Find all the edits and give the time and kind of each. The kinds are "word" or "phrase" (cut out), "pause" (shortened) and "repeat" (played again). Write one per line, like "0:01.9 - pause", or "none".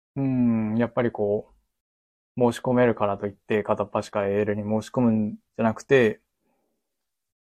0:01.8 - pause
0:05.5 - pause